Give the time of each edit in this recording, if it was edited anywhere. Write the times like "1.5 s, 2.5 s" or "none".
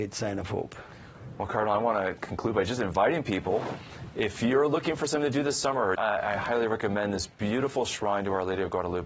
5.9 s